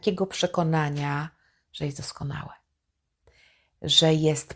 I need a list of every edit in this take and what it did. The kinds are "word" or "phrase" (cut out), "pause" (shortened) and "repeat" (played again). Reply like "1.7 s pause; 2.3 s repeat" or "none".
none